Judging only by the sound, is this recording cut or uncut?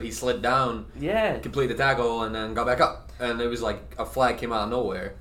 uncut